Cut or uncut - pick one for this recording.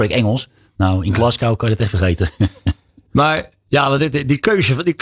uncut